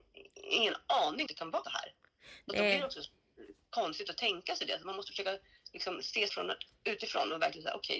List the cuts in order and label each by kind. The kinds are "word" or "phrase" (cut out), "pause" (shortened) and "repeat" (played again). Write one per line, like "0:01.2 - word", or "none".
0:01.3 - phrase
0:01.6 - word
0:06.3 - word

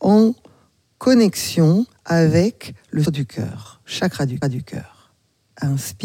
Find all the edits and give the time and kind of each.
0:03.1 - word
0:04.4 - repeat

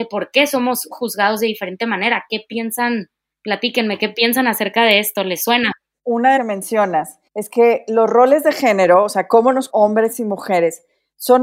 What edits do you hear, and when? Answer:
0:06.4 - phrase
0:07.3 - pause
0:09.7 - word

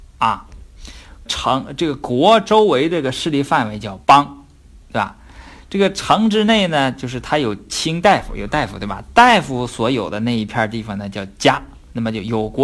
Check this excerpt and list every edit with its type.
0:01.3 - word
0:04.0 - pause

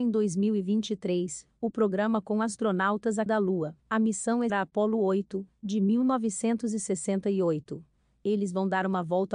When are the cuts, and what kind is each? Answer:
0:02.2 - word
0:03.3 - word
0:03.8 - pause
0:04.5 - word

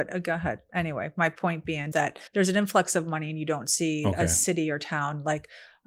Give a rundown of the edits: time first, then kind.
0:01.9 - word
0:02.3 - pause

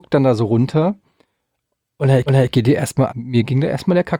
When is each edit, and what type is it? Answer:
0:02.3 - repeat
0:03.1 - word

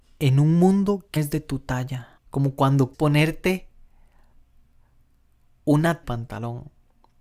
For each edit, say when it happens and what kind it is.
0:01.2 - word
0:02.2 - pause
0:02.9 - word
0:06.0 - phrase

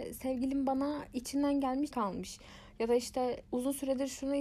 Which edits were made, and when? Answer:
0:01.9 - word

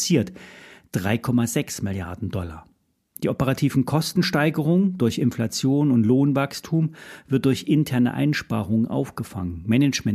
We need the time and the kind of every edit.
0:05.0 - word

